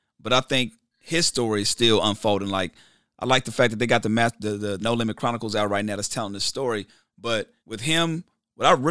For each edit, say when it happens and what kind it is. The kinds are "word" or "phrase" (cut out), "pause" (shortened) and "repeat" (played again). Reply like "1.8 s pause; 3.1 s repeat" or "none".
4.8 s word; 7.6 s pause